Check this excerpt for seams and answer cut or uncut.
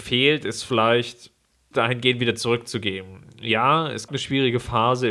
cut